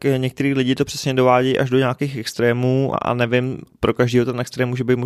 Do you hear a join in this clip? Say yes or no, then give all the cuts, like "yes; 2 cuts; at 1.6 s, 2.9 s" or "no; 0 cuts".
yes; 1 cut; at 2.9 s